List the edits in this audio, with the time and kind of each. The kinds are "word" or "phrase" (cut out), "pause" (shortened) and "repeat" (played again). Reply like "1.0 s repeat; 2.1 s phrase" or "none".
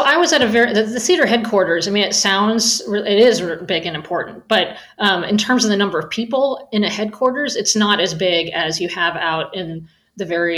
none